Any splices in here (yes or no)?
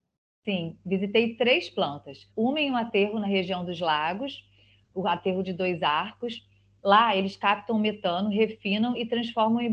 yes